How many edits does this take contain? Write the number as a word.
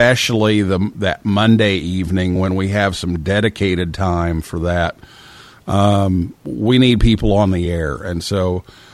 zero